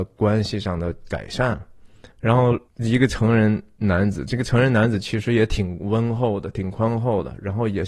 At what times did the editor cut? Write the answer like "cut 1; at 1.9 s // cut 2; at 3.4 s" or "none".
cut 1; at 2.1 s // cut 2; at 2.7 s